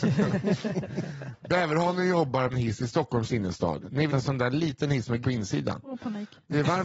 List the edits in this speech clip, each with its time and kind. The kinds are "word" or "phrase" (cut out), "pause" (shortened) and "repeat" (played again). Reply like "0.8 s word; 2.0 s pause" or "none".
2.5 s word; 4.1 s word; 5.2 s word